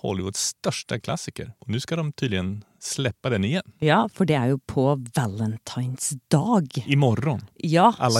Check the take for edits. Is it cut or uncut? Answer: uncut